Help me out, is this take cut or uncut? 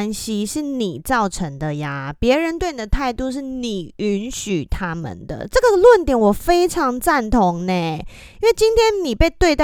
uncut